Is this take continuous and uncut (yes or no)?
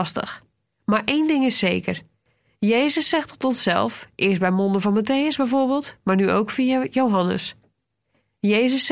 yes